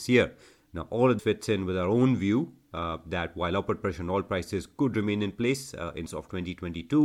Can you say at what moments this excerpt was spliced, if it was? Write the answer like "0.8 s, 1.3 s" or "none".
1.2 s, 6.1 s